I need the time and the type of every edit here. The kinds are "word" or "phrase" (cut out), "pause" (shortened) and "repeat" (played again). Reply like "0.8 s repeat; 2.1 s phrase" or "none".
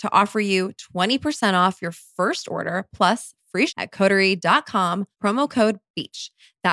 3.7 s word; 5.1 s pause